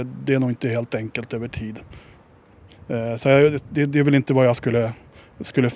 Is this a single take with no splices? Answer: yes; 0 cuts

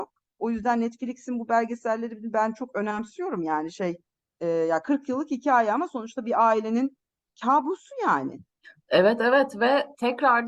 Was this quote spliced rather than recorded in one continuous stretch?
no; 0 cuts

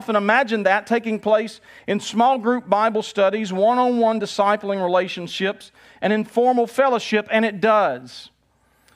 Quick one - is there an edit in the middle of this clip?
no; 0 cuts

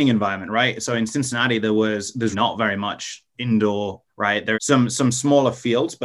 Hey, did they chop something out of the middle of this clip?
yes; 3 cuts; at 2.3 s, 4.1 s, 4.5 s

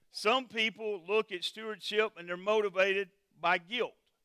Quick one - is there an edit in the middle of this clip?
no; 0 cuts

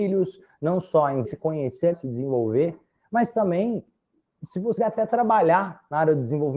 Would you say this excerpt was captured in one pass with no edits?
no; 3 cuts; at 1.2 s, 1.9 s, 4.8 s

